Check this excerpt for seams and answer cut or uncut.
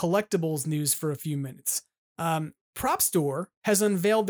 uncut